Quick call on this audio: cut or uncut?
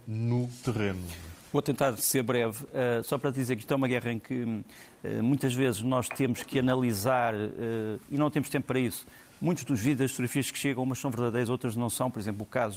uncut